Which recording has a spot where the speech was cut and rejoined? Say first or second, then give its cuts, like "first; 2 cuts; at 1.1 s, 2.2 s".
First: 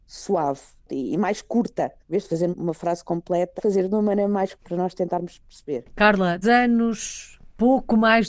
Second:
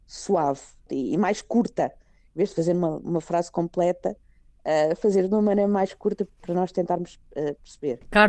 first; 6 cuts; at 2.0 s, 2.5 s, 3.6 s, 4.5 s, 5.4 s, 6.4 s